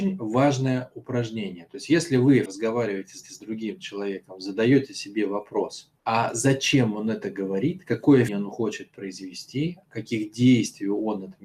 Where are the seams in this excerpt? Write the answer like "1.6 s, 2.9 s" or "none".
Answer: 2.5 s, 3.2 s, 6.0 s, 8.3 s